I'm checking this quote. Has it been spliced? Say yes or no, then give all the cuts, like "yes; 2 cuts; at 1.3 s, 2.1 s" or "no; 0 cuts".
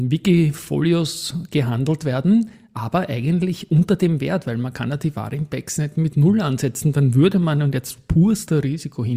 no; 0 cuts